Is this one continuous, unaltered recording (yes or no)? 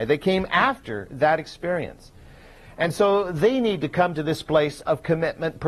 yes